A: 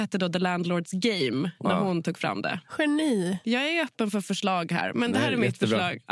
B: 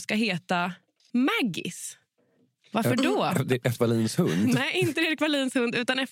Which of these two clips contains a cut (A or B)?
B